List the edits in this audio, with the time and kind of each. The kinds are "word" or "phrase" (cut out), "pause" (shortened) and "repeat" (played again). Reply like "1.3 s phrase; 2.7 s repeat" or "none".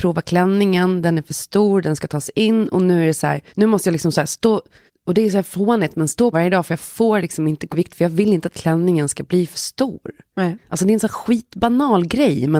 3.5 s pause; 4.9 s pause; 6.3 s phrase; 7.7 s word